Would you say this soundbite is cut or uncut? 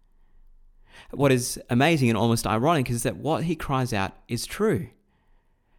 uncut